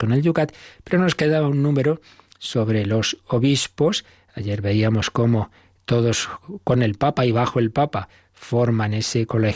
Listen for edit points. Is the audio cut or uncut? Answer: uncut